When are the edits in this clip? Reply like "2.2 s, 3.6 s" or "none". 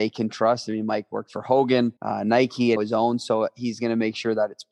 2.0 s, 2.8 s